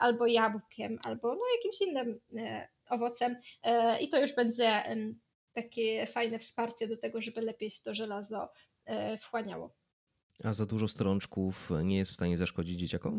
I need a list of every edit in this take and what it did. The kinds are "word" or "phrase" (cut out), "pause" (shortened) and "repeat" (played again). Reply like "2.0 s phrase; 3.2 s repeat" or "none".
none